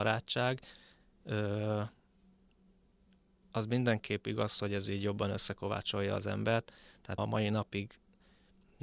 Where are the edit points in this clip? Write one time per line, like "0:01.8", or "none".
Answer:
0:07.2